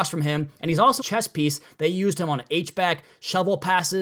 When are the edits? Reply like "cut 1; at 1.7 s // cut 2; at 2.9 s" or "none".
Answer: cut 1; at 1.0 s